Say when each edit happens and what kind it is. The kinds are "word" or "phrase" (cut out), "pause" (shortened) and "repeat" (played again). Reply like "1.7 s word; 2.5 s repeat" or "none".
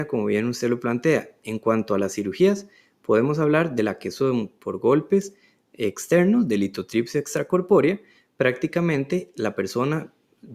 none